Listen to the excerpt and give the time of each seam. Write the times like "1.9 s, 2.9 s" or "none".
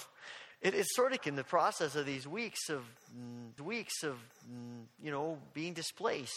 1.2 s, 3.6 s